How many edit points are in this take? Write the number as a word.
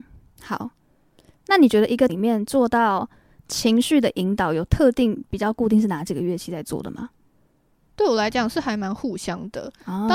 one